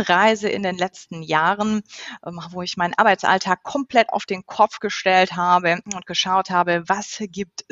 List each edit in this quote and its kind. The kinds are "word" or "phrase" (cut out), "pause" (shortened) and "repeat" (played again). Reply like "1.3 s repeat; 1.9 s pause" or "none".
5.8 s pause